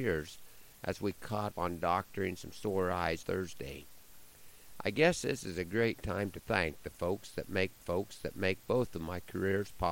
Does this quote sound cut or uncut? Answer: cut